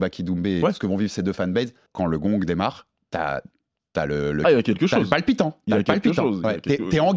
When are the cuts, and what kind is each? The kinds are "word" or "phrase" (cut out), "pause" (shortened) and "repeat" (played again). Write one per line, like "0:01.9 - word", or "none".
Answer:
0:01.9 - pause